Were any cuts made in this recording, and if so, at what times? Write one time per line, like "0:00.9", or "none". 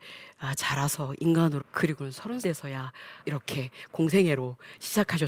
0:01.6
0:02.4
0:03.2